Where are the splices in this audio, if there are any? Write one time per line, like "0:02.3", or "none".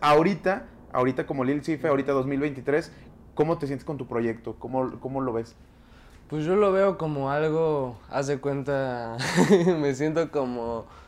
none